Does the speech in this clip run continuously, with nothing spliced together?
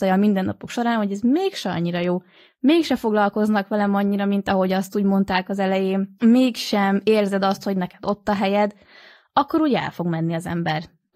yes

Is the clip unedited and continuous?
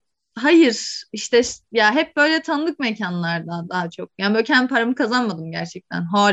yes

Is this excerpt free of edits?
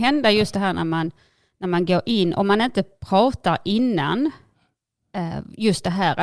yes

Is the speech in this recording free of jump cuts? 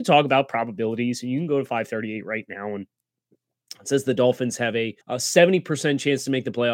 no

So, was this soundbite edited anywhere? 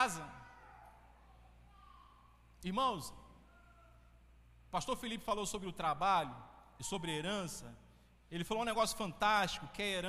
no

